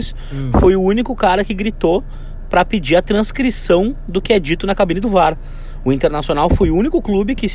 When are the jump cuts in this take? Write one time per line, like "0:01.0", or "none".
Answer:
none